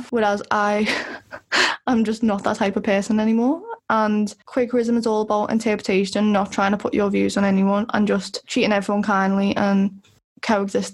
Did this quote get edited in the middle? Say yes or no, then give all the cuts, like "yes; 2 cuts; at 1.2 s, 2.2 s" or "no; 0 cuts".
no; 0 cuts